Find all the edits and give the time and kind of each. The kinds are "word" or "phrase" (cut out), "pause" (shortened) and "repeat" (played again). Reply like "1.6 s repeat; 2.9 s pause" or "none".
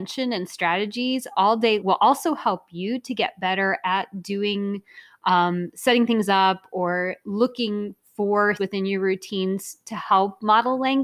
1.8 s word; 8.6 s word